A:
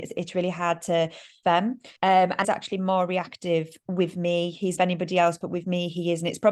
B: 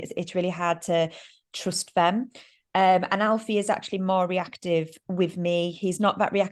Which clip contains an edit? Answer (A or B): A